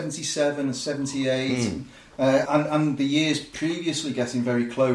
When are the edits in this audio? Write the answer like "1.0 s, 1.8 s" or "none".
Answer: 2.5 s